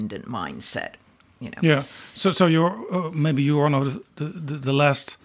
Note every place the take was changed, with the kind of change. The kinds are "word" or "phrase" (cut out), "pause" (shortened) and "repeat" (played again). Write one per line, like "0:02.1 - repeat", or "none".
none